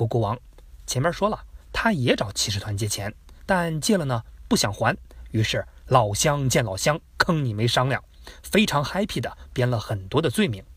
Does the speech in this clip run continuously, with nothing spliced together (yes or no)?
no